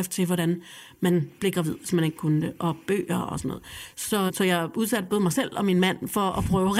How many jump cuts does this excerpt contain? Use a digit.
1